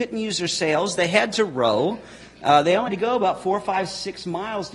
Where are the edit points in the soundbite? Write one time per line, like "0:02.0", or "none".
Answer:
0:02.9